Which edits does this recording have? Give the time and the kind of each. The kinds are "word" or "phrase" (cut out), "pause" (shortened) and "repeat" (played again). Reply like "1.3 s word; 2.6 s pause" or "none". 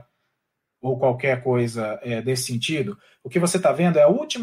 none

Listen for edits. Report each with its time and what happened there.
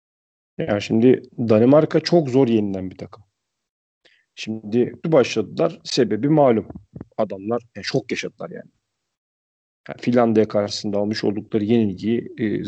5.0 s phrase; 7.1 s pause

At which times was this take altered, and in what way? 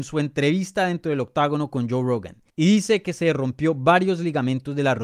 2.5 s pause

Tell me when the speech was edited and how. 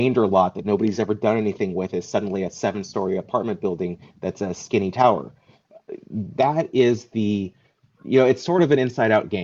none

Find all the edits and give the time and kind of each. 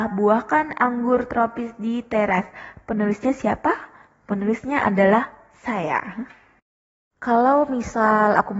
none

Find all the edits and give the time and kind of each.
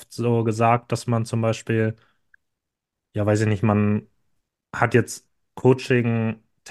none

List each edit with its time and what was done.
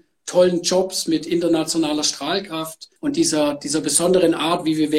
3.0 s pause

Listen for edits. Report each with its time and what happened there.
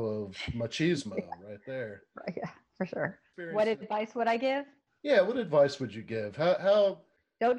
none

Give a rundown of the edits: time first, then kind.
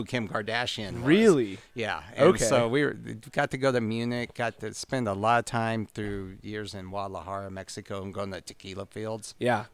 none

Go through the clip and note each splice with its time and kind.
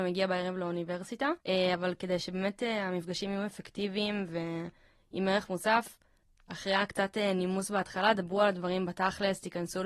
1.4 s pause; 6.2 s pause

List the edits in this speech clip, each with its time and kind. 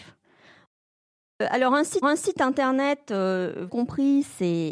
2.0 s repeat; 3.7 s phrase

